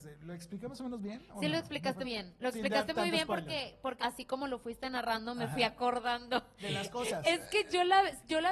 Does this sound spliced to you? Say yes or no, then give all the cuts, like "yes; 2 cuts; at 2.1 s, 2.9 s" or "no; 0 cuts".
yes; 2 cuts; at 2.0 s, 4.0 s